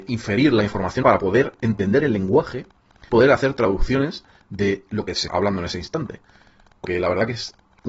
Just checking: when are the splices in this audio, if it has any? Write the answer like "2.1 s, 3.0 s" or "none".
1.0 s, 3.1 s, 5.3 s, 6.8 s